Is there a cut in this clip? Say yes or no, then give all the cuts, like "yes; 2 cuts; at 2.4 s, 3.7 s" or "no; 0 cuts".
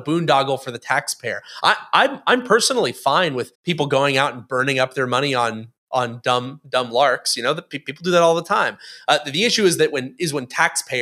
yes; 1 cut; at 3.5 s